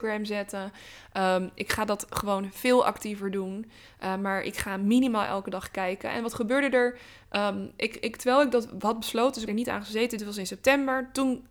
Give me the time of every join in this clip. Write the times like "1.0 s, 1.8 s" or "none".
9.5 s